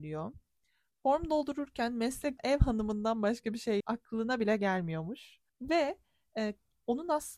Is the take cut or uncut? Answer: cut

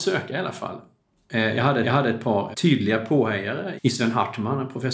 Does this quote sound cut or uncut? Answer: cut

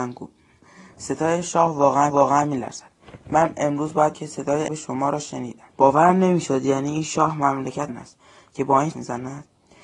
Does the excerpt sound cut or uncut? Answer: cut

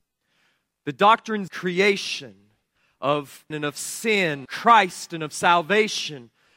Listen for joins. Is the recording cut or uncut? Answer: cut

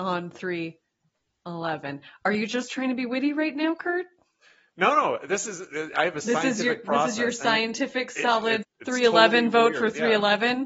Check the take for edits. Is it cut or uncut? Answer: cut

